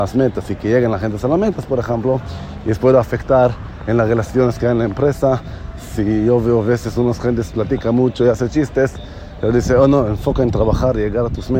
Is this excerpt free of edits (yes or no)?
yes